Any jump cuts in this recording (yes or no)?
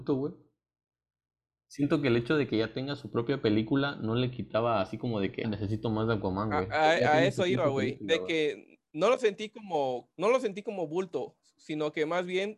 yes